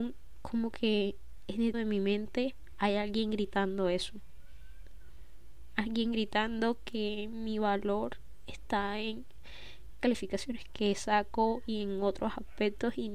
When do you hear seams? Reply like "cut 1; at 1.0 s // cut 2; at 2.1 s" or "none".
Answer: cut 1; at 1.7 s // cut 2; at 10.0 s